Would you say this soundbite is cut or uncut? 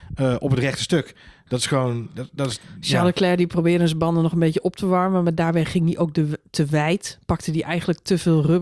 uncut